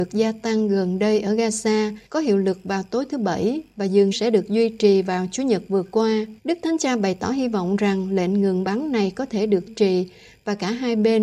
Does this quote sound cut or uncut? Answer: cut